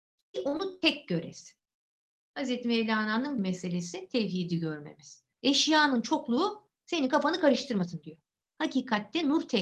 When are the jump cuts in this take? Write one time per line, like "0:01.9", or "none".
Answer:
0:03.4